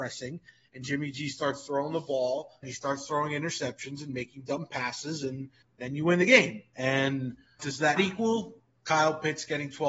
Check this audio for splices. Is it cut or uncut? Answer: cut